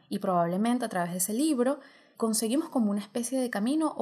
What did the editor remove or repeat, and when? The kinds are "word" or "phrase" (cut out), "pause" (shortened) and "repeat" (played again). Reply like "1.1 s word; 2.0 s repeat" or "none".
2.1 s word